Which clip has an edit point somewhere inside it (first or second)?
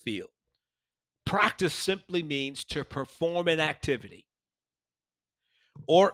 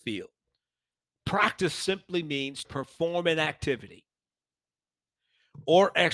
second